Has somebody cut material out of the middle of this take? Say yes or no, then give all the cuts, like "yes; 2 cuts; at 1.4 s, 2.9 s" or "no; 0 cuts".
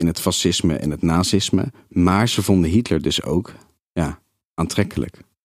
no; 0 cuts